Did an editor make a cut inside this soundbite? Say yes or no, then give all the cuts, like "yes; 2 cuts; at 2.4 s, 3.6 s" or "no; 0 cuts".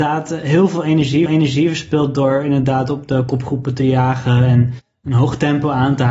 yes; 1 cut; at 1.3 s